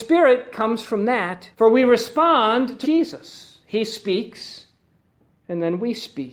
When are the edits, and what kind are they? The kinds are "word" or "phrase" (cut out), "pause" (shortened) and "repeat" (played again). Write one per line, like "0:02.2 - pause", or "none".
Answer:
0:01.5 - pause
0:02.8 - phrase